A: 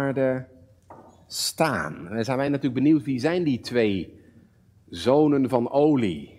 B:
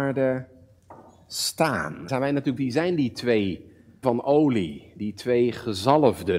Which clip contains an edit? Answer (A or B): B